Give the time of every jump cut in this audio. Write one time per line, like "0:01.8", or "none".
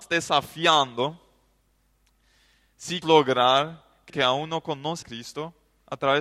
0:03.0
0:04.1
0:05.0